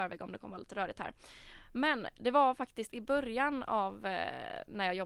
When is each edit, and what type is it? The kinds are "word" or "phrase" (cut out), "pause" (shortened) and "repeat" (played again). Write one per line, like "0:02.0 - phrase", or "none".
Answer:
none